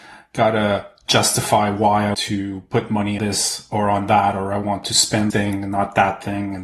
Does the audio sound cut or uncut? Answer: cut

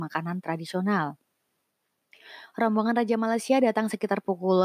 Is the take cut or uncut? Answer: uncut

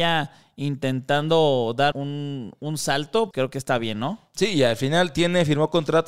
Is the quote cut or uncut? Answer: cut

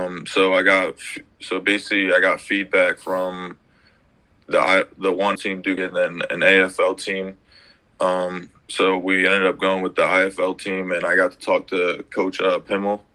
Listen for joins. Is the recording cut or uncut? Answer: cut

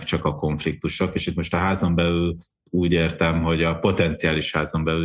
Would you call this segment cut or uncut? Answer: uncut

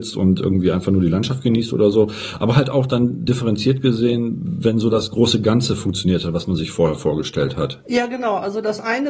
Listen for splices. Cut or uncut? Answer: uncut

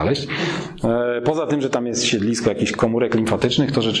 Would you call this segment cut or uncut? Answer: uncut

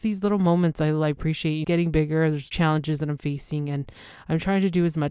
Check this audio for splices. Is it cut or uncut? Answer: cut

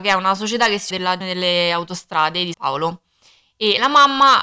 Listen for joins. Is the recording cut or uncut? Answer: cut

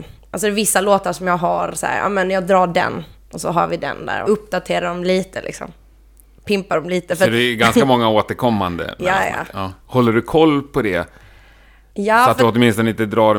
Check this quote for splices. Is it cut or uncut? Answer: cut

